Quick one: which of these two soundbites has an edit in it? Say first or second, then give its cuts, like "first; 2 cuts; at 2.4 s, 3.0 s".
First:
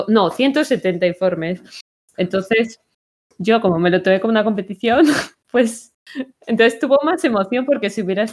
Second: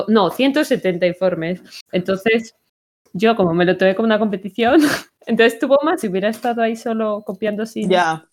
second; 3 cuts; at 1.9 s, 5.2 s, 6.0 s